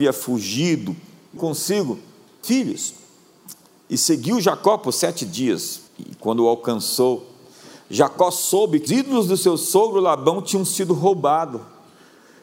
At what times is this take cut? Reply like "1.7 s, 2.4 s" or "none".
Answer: 1.4 s, 2.4 s, 5.9 s, 8.9 s

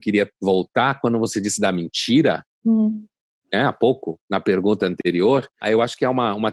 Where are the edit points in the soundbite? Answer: 2.5 s, 4.2 s

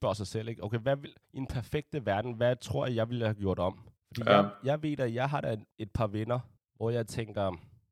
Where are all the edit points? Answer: 1.2 s, 4.0 s, 5.7 s, 6.6 s

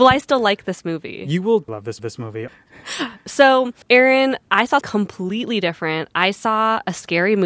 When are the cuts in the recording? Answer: 1.7 s, 2.0 s, 3.8 s, 4.8 s

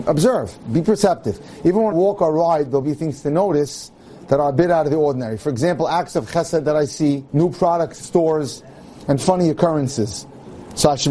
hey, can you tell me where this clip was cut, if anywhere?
1.9 s, 2.8 s, 7.3 s, 8.0 s

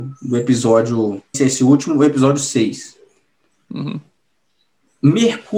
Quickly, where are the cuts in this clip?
1.3 s

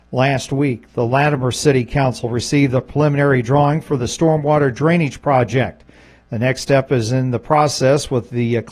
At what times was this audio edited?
none

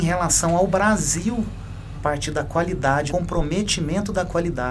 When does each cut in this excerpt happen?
1.9 s, 3.1 s

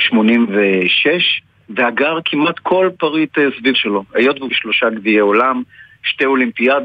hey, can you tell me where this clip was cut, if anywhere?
3.7 s, 4.5 s

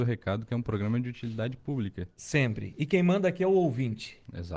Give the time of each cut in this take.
none

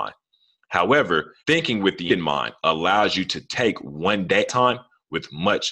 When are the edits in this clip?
1.4 s, 2.1 s, 4.5 s

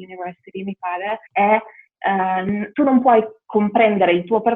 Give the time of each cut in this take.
1.3 s, 2.7 s

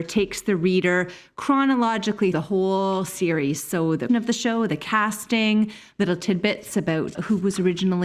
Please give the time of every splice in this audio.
2.3 s, 4.1 s, 7.1 s

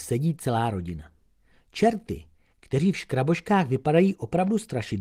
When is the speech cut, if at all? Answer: none

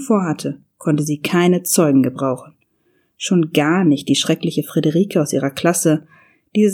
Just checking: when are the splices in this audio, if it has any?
none

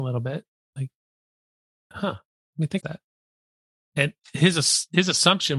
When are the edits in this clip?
2.8 s

